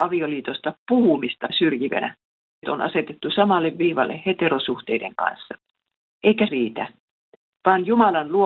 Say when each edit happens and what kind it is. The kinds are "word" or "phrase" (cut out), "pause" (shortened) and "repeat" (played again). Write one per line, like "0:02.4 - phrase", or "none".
0:01.5 - word
0:02.6 - word
0:06.5 - word

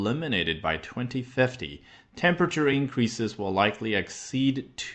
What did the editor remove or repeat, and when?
none

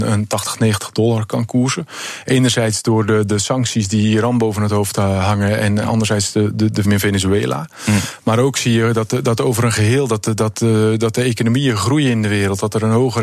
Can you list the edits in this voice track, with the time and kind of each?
0:06.8 - phrase

